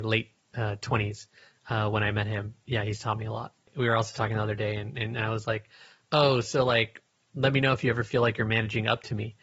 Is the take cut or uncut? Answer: uncut